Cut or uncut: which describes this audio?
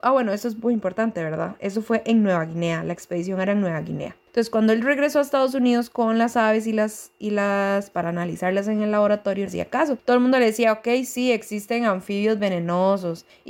cut